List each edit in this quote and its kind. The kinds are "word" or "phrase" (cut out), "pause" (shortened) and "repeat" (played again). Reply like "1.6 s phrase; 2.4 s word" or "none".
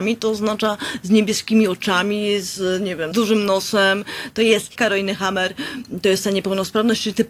3.1 s phrase; 4.8 s phrase

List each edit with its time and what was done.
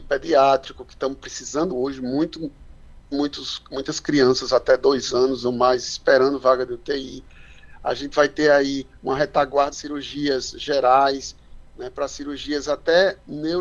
1.7 s word; 3.1 s word; 9.7 s phrase

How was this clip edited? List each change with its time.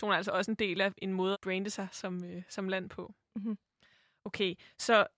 1.3 s word

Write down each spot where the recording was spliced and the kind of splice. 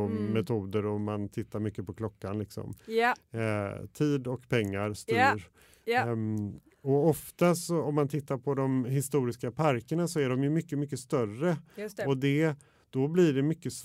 none

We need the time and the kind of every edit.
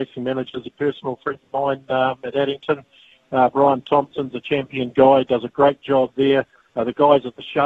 none

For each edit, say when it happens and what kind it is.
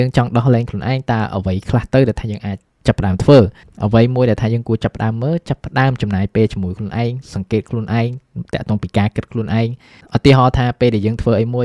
none

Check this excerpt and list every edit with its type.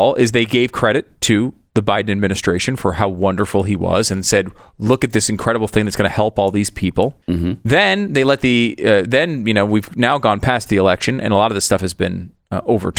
7.2 s pause

